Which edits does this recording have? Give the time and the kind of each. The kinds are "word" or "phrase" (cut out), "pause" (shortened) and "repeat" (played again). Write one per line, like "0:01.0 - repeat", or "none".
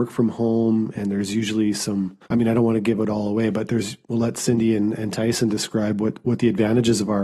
0:02.2 - pause
0:04.0 - pause